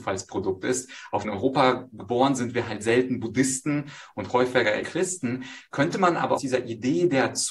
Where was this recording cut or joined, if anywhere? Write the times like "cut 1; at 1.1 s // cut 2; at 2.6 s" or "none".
cut 1; at 1.2 s // cut 2; at 2.4 s // cut 3; at 4.8 s // cut 4; at 6.4 s